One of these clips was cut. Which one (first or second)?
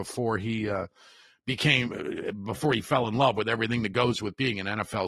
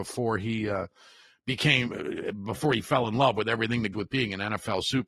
second